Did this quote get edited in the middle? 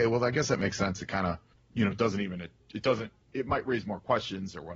yes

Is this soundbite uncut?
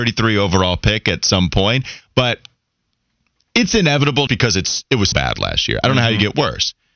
no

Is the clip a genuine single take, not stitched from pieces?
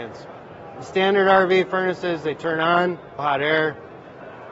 no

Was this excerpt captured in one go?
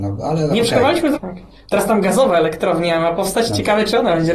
no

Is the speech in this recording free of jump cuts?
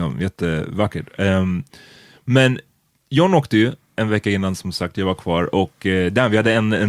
yes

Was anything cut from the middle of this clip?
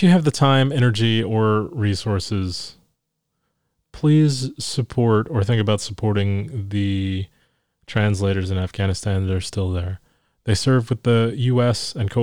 no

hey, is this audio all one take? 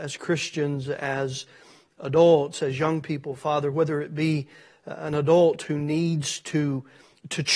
yes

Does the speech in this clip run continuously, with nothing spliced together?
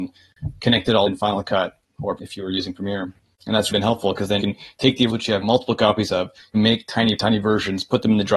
no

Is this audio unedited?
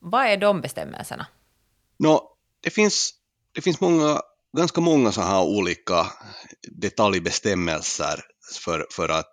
yes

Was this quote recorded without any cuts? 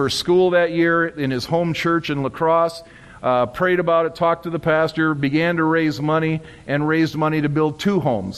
yes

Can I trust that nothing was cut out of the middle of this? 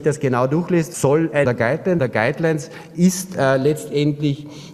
no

